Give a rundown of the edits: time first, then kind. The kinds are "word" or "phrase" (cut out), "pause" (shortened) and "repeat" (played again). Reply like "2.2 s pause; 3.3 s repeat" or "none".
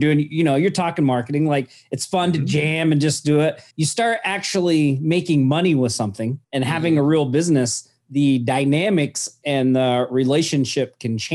3.7 s pause; 6.4 s pause

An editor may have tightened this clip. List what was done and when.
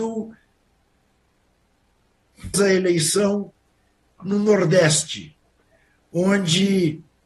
2.5 s word; 4.2 s phrase

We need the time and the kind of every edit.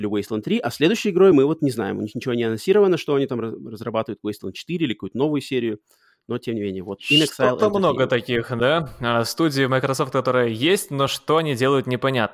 none

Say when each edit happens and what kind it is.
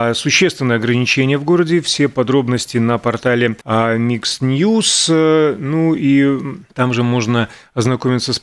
3.6 s pause; 6.7 s pause

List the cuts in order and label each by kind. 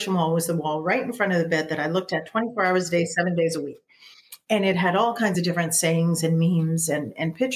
none

